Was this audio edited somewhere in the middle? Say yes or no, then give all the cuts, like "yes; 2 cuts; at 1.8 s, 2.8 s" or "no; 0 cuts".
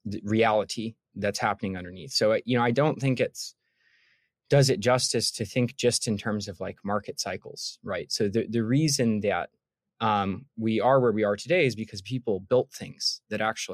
no; 0 cuts